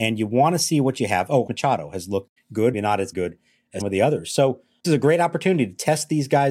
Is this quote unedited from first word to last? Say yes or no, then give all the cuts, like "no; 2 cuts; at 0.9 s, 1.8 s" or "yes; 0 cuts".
no; 6 cuts; at 1.5 s, 2.4 s, 2.7 s, 3.1 s, 3.8 s, 4.8 s